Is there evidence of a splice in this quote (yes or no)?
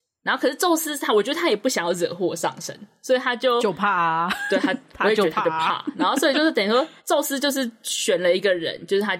yes